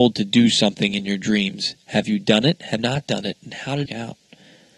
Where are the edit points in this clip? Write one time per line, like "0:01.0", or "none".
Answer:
0:02.8
0:03.9